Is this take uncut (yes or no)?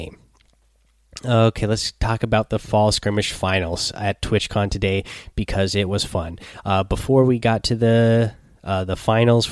yes